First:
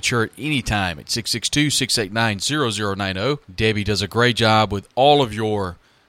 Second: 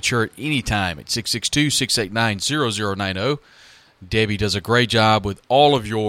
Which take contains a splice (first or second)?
first